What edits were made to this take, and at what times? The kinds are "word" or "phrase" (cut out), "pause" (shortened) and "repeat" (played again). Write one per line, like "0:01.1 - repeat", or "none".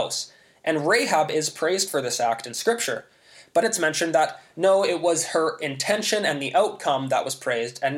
0:03.6 - word